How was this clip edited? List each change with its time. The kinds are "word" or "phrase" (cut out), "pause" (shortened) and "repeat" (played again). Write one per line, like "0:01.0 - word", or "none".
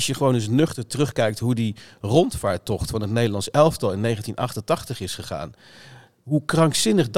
none